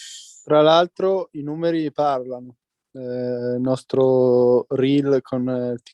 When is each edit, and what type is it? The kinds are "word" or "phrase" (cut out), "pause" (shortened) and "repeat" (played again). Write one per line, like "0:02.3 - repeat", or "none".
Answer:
none